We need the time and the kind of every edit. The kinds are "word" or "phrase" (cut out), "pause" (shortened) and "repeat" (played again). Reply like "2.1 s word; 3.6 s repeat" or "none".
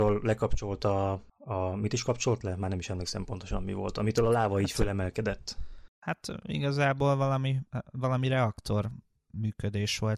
none